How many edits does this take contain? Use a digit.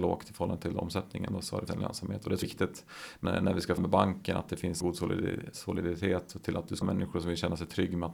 6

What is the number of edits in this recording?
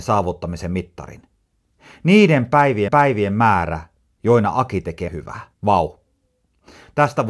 3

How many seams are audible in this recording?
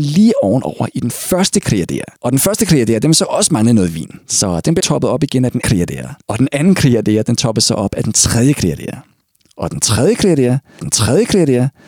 6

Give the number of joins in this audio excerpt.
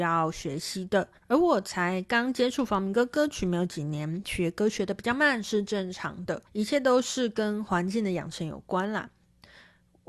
2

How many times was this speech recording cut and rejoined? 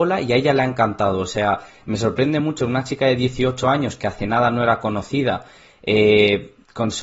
0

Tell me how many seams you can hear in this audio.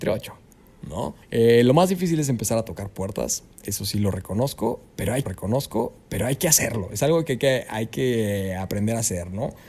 2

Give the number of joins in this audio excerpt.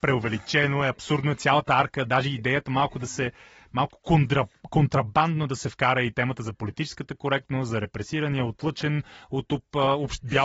0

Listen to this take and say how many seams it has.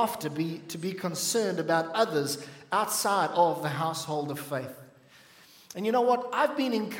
0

